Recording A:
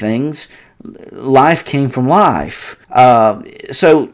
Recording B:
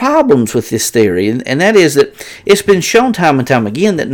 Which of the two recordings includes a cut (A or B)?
A